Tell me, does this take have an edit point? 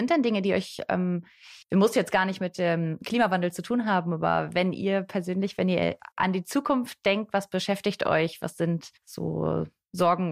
yes; 3 cuts; at 1.6 s, 6.1 s, 9.0 s

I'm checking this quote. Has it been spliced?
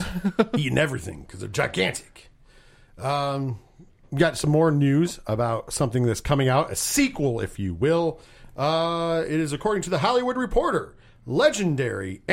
no; 0 cuts

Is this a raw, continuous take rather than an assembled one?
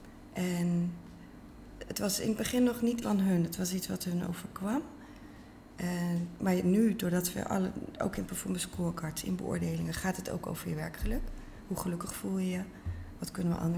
no; 1 cut; at 3.0 s

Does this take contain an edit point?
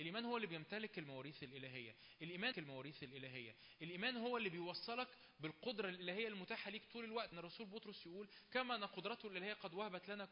yes; 2 cuts; at 2.5 s, 7.3 s

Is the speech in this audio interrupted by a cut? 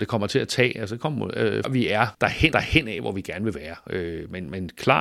yes; 3 cuts; at 1.6 s, 2.1 s, 2.5 s

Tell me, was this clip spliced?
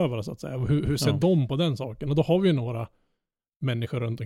no; 0 cuts

